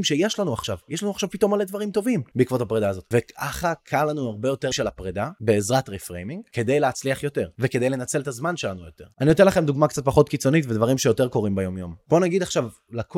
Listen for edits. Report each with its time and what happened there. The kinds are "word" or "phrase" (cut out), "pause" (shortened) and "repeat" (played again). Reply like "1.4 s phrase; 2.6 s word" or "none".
4.7 s phrase